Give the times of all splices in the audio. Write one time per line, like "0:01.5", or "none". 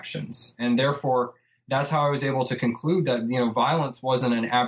none